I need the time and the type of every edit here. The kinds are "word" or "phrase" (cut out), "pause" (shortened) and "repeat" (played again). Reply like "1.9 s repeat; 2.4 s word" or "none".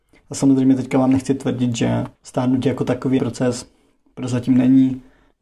2.2 s pause; 3.2 s phrase